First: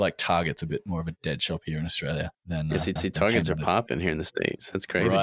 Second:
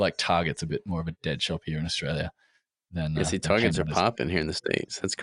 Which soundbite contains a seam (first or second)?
first